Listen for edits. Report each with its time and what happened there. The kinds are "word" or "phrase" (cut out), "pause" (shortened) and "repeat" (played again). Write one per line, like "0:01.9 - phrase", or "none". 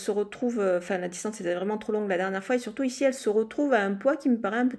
none